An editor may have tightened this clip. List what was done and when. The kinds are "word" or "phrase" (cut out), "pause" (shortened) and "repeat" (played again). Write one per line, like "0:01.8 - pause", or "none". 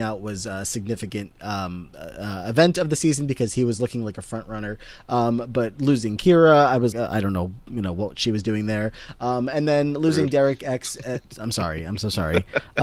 0:01.9 - pause
0:06.9 - word